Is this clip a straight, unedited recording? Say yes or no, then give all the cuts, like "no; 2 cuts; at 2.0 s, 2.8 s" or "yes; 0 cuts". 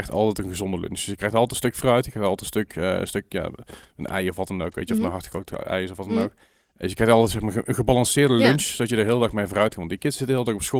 yes; 0 cuts